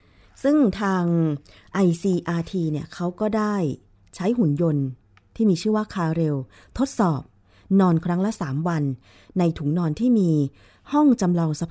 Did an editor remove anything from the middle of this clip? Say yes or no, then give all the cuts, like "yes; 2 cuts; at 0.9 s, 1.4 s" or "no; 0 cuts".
no; 0 cuts